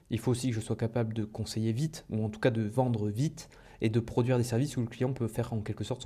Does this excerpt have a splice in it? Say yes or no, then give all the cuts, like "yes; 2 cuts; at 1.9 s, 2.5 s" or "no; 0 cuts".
no; 0 cuts